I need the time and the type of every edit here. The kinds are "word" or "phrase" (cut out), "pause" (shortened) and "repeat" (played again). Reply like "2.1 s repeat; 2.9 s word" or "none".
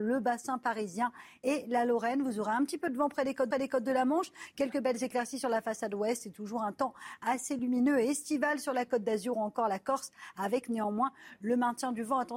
3.5 s repeat